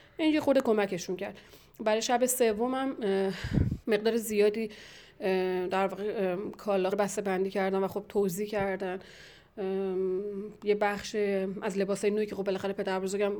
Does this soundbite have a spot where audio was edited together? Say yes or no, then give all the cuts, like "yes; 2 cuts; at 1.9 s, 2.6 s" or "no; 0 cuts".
yes; 2 cuts; at 3.8 s, 6.9 s